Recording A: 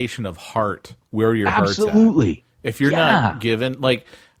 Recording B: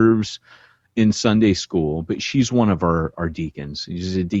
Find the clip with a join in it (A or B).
A